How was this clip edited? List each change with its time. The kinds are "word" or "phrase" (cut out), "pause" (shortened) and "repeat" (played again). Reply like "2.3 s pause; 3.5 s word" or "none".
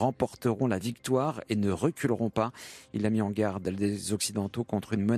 none